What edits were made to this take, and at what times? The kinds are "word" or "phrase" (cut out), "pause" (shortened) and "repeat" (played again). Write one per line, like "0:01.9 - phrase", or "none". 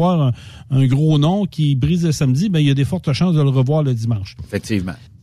none